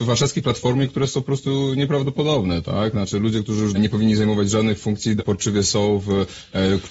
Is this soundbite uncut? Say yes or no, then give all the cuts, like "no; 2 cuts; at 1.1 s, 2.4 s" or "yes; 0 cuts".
no; 2 cuts; at 3.7 s, 5.2 s